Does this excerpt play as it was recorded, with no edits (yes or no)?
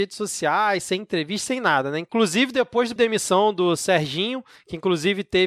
no